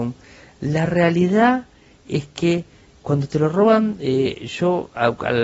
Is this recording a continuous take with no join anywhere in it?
yes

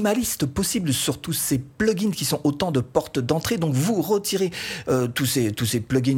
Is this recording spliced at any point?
no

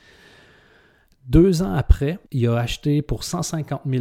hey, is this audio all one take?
no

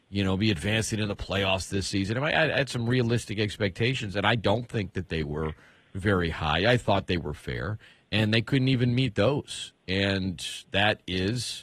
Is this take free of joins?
yes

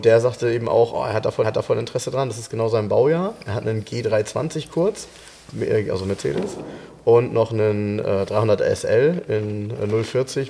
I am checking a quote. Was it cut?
yes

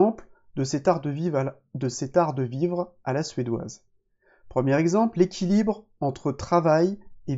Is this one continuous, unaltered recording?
yes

